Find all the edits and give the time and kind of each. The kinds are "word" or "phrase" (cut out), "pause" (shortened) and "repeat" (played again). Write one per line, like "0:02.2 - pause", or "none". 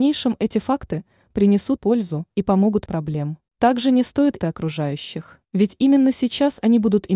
0:01.8 - phrase
0:02.3 - pause
0:02.9 - phrase
0:03.5 - pause
0:04.4 - phrase
0:05.4 - pause